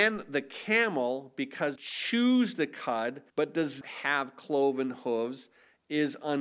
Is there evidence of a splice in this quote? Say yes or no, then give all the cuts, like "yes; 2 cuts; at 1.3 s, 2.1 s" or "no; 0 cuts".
yes; 3 cuts; at 1.8 s, 3.3 s, 3.8 s